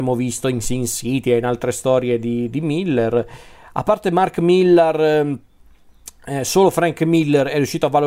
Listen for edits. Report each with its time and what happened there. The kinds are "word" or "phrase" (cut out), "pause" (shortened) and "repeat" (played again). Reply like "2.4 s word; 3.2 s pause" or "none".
none